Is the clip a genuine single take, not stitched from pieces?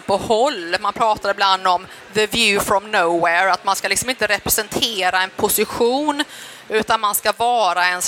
yes; 0 cuts

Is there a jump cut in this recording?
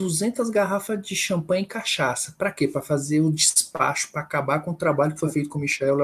no; 0 cuts

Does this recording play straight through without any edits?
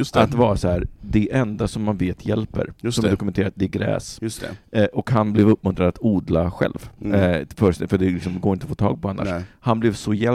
yes; 0 cuts

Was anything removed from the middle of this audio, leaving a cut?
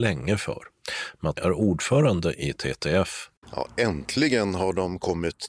yes; 2 cuts; at 1.4 s, 3.4 s

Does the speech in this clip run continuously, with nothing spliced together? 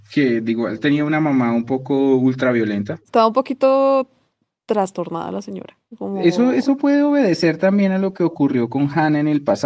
yes; 0 cuts

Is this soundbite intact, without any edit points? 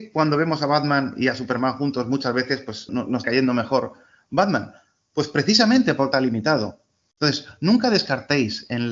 no; 3 cuts; at 2.9 s, 3.2 s, 6.1 s

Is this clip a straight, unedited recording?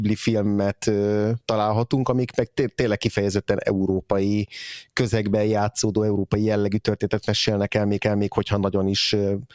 no; 1 cut; at 8.0 s

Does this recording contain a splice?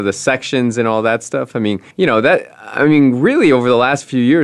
yes; 1 cut; at 1.9 s

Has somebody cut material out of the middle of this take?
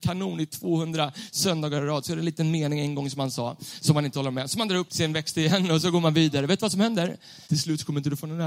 yes; 2 cuts; at 4.9 s, 7.4 s

